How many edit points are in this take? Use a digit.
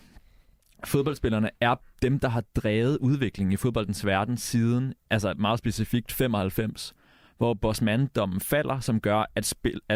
0